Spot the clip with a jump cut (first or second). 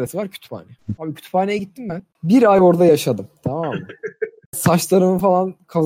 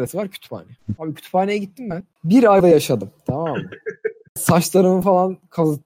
second